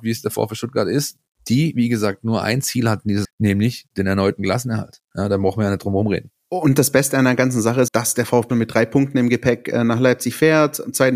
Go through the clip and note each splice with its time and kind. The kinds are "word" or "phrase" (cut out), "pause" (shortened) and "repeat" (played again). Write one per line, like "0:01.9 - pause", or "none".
0:03.2 - word
0:07.9 - word
0:08.5 - word